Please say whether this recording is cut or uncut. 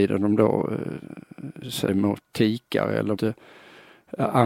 cut